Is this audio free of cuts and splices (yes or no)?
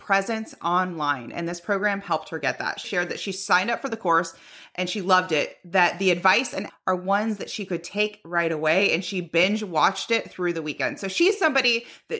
no